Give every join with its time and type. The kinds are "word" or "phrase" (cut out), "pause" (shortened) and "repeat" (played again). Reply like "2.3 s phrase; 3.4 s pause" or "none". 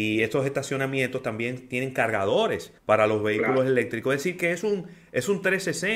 2.8 s pause